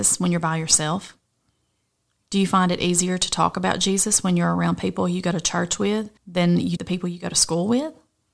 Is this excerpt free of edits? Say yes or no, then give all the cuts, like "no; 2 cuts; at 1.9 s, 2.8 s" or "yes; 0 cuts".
no; 2 cuts; at 6.2 s, 6.8 s